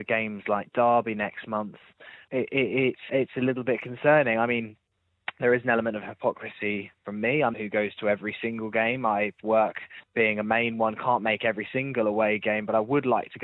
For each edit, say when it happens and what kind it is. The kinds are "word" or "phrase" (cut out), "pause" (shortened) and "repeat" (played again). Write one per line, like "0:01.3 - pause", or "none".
0:02.3 - word
0:03.1 - word
0:07.0 - pause
0:07.5 - phrase
0:09.4 - phrase
0:10.0 - pause